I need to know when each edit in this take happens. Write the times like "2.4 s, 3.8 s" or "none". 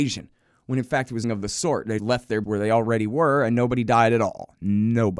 1.2 s, 2.0 s, 2.4 s